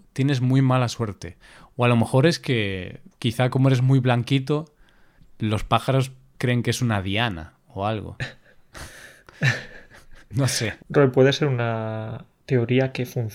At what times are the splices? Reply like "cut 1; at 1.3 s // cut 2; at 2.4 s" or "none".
cut 1; at 3.1 s